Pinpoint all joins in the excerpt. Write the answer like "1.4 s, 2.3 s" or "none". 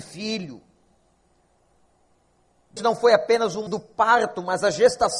2.8 s, 3.7 s